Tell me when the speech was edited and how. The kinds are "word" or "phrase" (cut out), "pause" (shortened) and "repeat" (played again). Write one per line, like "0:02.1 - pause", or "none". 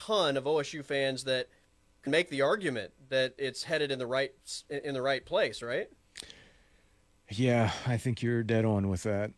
0:02.1 - word